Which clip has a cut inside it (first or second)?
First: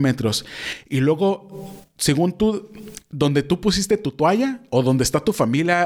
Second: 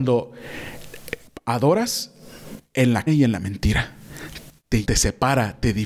second